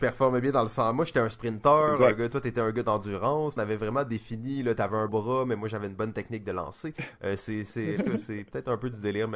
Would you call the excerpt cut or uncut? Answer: cut